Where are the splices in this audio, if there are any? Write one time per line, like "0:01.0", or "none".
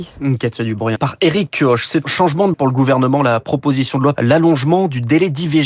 0:01.0
0:02.0
0:02.5
0:04.1